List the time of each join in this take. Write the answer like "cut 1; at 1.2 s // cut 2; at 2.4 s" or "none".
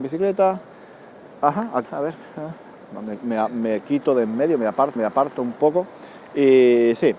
cut 1; at 1.9 s // cut 2; at 5.0 s // cut 3; at 6.2 s